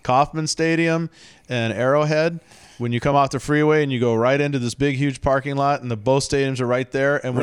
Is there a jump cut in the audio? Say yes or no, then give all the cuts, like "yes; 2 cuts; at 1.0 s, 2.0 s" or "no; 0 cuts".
no; 0 cuts